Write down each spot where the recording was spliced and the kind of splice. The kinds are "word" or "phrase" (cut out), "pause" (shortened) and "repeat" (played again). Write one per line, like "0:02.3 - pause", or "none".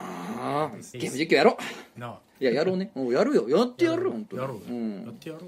0:00.9 - phrase
0:02.0 - phrase
0:02.4 - pause